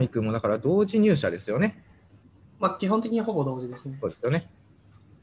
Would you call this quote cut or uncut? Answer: uncut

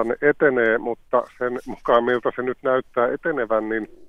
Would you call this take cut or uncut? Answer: uncut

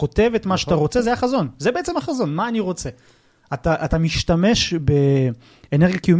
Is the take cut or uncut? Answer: uncut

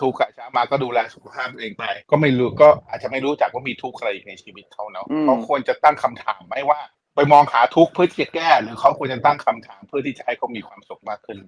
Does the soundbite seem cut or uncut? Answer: cut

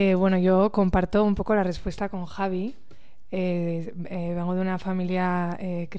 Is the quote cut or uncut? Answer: uncut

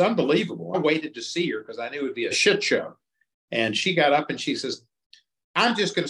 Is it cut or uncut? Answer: uncut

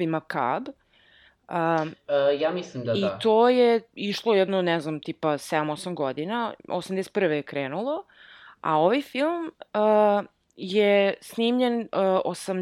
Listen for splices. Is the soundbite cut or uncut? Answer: uncut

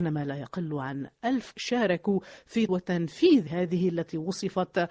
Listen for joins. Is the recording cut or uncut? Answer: cut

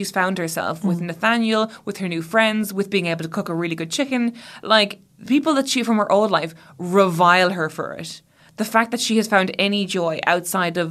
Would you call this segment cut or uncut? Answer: uncut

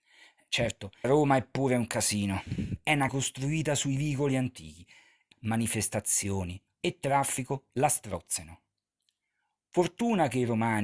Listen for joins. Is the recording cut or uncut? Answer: cut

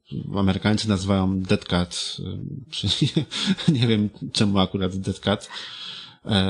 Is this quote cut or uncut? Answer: uncut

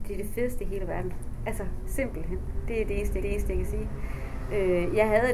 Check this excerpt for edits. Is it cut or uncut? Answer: cut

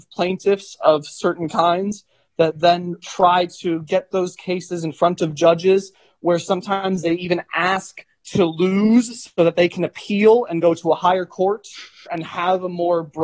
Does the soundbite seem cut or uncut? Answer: uncut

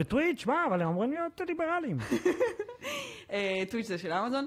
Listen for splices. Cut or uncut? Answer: uncut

